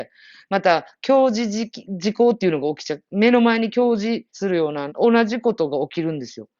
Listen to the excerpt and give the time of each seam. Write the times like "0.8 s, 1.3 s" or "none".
4.3 s, 4.9 s